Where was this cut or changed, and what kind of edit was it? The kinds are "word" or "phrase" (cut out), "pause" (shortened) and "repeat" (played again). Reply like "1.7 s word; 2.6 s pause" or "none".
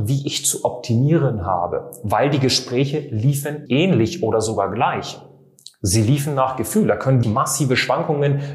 3.7 s word; 7.2 s word